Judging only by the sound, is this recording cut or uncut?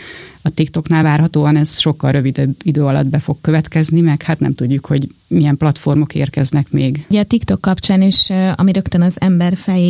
uncut